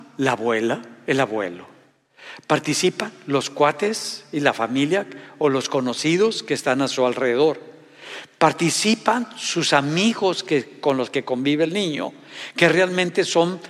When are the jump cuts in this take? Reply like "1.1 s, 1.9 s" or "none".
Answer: none